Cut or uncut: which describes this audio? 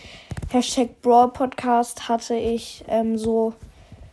uncut